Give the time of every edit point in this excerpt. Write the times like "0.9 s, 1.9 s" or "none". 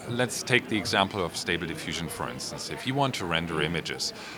none